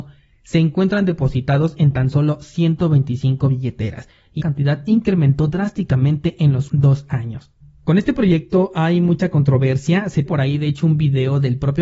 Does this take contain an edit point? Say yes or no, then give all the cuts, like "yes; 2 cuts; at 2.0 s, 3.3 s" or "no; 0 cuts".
yes; 3 cuts; at 4.4 s, 6.7 s, 10.3 s